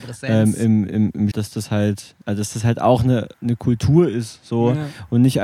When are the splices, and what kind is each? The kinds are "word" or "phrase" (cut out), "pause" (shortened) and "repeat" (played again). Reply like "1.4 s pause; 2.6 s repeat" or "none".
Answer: 1.3 s word; 2.2 s pause; 3.3 s pause